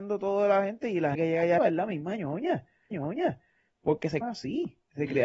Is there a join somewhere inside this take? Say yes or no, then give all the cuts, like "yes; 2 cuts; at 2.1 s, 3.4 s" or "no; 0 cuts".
yes; 4 cuts; at 1.1 s, 1.6 s, 2.9 s, 4.2 s